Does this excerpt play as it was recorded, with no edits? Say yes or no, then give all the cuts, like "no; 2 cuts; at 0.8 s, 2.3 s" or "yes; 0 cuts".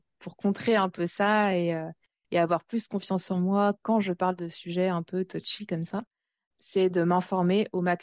yes; 0 cuts